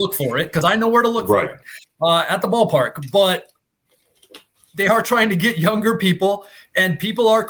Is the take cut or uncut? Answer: uncut